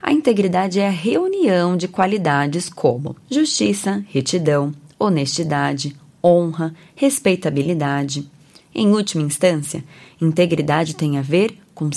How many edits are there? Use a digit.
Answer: 0